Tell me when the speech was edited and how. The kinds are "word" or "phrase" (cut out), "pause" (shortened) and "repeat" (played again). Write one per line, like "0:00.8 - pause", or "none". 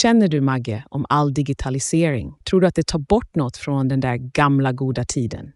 0:02.4 - pause